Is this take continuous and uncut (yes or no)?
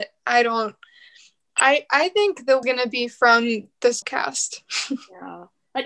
no